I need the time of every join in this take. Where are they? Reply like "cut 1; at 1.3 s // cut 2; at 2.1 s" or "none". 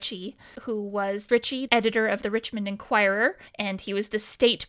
cut 1; at 1.3 s // cut 2; at 1.7 s // cut 3; at 3.5 s